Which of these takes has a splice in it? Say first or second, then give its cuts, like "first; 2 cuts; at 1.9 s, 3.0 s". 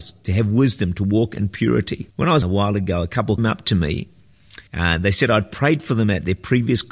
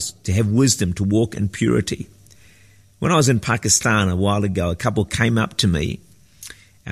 first; 4 cuts; at 2.1 s, 2.4 s, 3.4 s, 4.7 s